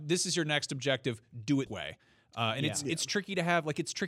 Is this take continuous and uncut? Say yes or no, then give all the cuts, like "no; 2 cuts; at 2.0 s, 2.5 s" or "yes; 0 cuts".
no; 1 cut; at 1.7 s